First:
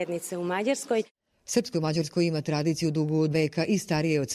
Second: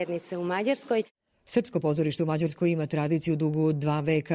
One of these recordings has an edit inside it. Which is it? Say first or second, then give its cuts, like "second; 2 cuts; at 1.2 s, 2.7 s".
first; 2 cuts; at 1.7 s, 3.3 s